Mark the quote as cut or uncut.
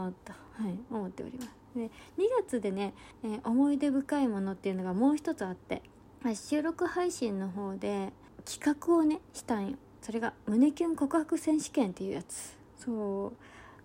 uncut